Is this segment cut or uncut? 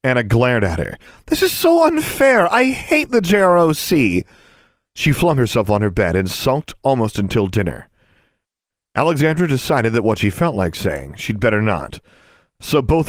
uncut